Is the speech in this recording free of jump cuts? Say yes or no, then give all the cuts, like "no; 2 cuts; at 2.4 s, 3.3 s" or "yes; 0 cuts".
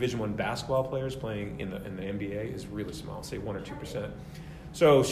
yes; 0 cuts